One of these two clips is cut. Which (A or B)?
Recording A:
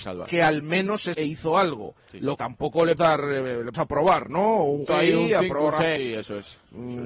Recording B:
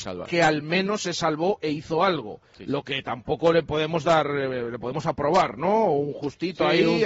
A